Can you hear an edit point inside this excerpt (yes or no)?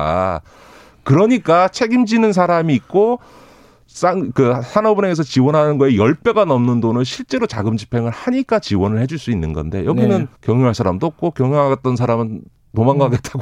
yes